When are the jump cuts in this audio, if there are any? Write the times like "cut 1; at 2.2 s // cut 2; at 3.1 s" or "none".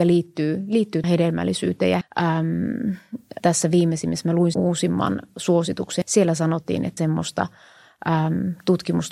cut 1; at 1.0 s // cut 2; at 2.0 s // cut 3; at 3.4 s // cut 4; at 4.5 s // cut 5; at 6.0 s // cut 6; at 7.0 s